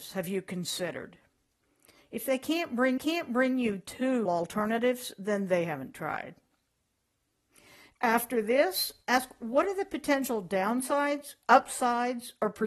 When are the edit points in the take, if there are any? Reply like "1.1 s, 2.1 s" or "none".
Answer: 3.0 s, 4.2 s